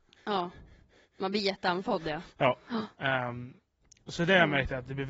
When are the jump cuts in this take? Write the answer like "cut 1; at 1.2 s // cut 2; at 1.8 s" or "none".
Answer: none